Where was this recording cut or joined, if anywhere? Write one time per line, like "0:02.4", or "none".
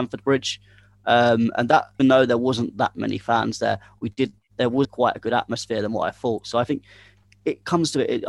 0:02.0
0:04.8